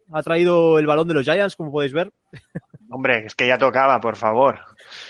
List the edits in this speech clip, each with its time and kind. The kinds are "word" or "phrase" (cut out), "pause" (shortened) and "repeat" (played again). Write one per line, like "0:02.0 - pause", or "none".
none